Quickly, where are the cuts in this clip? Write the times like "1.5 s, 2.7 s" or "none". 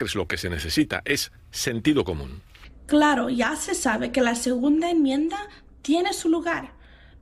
none